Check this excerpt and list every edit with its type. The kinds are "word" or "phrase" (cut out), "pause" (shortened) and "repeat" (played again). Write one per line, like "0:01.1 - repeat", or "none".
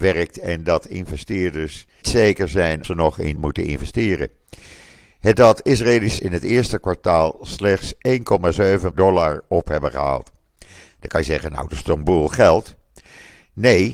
0:02.0 - word
0:02.8 - word
0:03.4 - word
0:05.3 - word
0:06.2 - word
0:08.9 - word